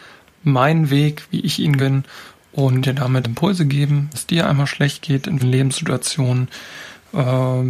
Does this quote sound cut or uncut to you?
cut